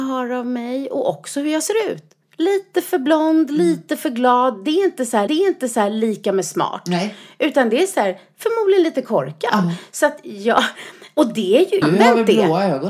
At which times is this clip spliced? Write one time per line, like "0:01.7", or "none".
0:02.2
0:05.3
0:11.8